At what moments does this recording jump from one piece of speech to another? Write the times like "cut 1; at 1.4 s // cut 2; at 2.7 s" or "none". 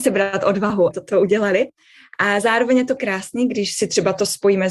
cut 1; at 0.9 s // cut 2; at 3.0 s